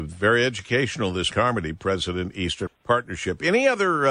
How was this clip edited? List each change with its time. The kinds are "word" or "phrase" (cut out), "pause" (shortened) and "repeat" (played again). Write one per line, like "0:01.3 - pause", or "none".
0:01.3 - phrase
0:02.7 - word

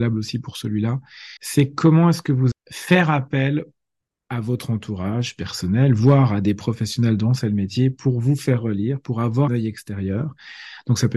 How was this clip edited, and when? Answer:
0:01.4 - pause
0:02.5 - word
0:09.5 - word

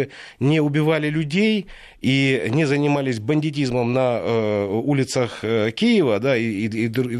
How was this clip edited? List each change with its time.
none

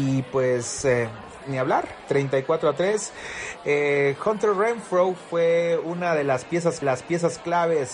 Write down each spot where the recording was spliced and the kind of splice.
0:06.8 - repeat

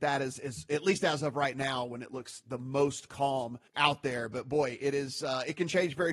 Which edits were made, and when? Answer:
0:03.7 - pause

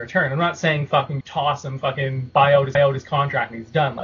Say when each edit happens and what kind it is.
0:01.2 - word
0:02.7 - repeat

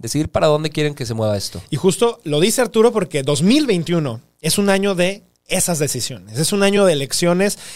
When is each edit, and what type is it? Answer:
none

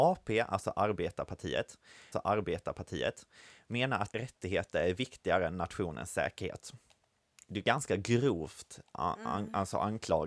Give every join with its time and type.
0:02.1 - repeat
0:04.1 - word

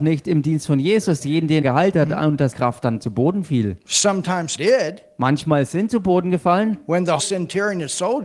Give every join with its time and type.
0:01.2 - word
0:01.6 - word
0:02.5 - word
0:04.6 - word
0:05.9 - word
0:07.2 - word

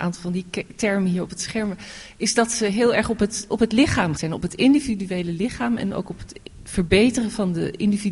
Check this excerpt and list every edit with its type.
0:04.2 - word

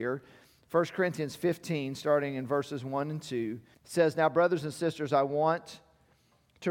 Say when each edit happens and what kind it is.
0:03.7 - pause

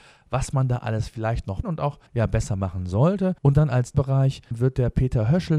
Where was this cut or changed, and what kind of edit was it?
0:01.6 - phrase
0:02.1 - pause
0:03.4 - pause
0:03.9 - word
0:04.5 - word

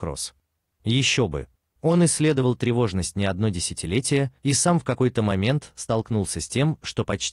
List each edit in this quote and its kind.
0:04.4 - pause

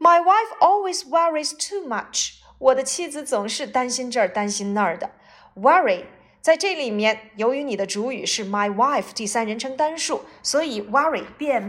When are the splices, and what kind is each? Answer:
none

